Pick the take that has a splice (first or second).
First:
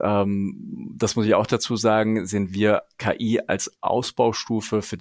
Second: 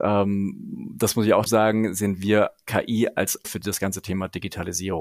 second